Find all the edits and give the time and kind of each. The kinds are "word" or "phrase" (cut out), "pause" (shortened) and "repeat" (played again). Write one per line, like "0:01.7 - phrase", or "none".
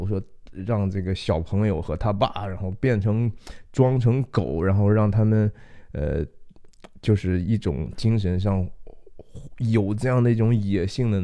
none